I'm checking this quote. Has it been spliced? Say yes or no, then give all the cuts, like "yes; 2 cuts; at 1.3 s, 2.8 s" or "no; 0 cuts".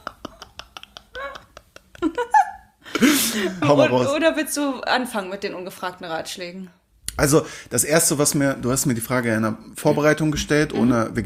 yes; 1 cut; at 3.6 s